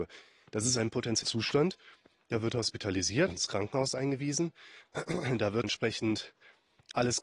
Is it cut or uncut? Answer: cut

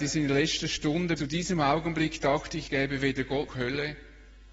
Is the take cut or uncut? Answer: cut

